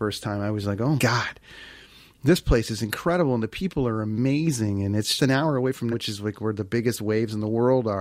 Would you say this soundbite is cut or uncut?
cut